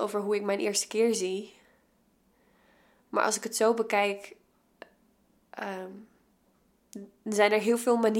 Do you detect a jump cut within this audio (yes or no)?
no